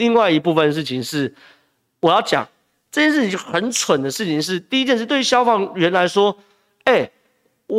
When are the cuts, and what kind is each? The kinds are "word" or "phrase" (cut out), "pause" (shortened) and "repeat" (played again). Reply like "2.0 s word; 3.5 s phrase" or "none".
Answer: none

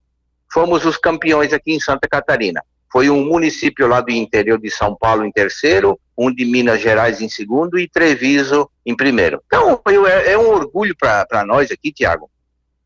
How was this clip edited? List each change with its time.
8.8 s pause

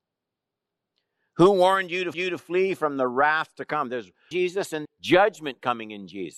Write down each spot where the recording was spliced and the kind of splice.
2.1 s repeat; 4.3 s phrase; 4.8 s word

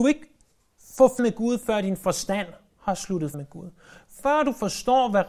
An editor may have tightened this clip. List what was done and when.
1.2 s word; 3.3 s word

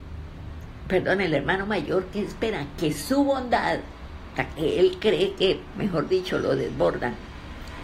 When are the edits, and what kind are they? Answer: none

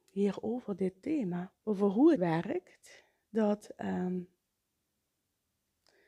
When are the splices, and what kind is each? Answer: 1.6 s pause; 2.1 s word

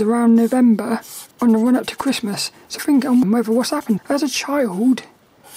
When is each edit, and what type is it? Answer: 1.3 s pause; 2.8 s word; 3.2 s word; 4.0 s word

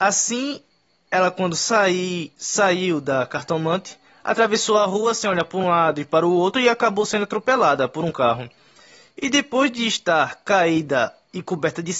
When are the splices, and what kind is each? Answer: none

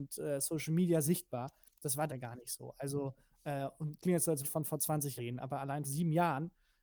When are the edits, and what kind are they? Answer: 1.0 s word; 2.1 s word; 4.0 s word; 4.4 s word; 5.2 s word; 5.8 s word

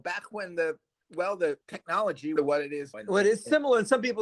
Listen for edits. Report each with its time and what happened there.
1.6 s word; 2.4 s phrase; 2.9 s word

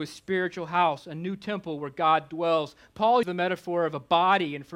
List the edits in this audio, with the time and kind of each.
3.2 s word

